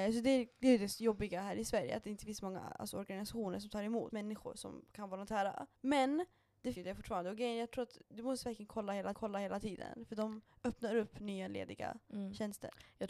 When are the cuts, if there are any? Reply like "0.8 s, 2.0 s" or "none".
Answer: 4.1 s, 5.7 s, 6.7 s, 8.0 s, 9.1 s